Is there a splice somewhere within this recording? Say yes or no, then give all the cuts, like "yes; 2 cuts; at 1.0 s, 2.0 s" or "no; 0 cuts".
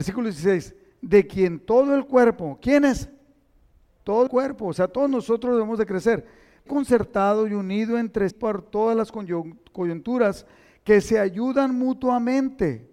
yes; 3 cuts; at 4.3 s, 6.7 s, 8.3 s